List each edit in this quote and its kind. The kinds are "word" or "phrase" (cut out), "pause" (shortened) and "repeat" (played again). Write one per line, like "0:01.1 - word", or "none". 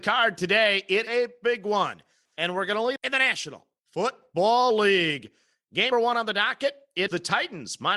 0:01.1 - word
0:03.0 - word
0:05.9 - word
0:07.1 - word